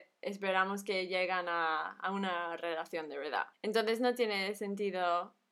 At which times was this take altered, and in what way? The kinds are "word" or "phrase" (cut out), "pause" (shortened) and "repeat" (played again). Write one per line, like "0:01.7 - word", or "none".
0:03.5 - pause